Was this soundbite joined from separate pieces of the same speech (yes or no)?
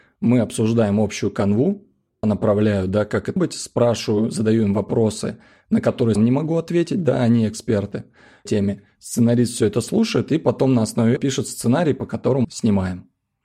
yes